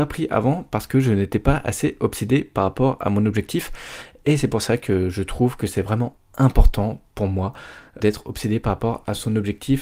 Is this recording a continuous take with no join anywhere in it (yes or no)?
no